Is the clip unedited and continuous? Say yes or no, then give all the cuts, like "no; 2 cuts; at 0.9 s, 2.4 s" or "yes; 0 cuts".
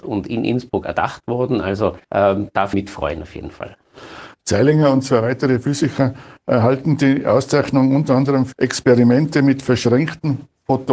no; 3 cuts; at 2.0 s, 2.7 s, 8.5 s